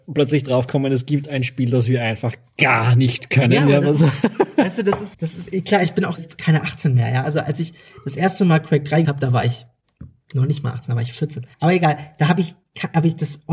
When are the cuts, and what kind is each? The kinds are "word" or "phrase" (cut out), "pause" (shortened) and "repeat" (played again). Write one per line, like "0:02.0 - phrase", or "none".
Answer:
0:05.1 - word
0:06.2 - word
0:09.0 - word
0:11.5 - pause